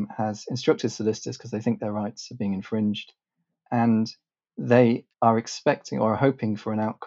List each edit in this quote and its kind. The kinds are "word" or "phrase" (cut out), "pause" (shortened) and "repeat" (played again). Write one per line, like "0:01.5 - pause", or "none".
0:05.1 - pause